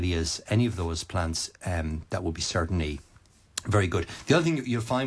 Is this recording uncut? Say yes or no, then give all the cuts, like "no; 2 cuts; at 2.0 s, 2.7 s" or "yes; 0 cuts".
yes; 0 cuts